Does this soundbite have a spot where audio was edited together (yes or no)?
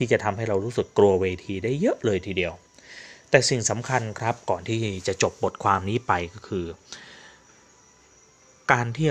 no